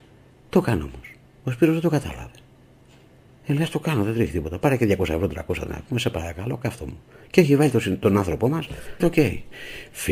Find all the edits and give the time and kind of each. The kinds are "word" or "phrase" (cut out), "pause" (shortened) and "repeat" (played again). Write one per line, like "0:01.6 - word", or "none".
0:05.7 - word
0:09.0 - word